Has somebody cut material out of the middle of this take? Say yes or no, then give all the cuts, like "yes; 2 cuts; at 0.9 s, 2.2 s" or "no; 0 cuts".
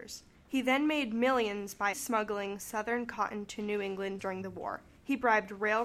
yes; 2 cuts; at 1.9 s, 4.2 s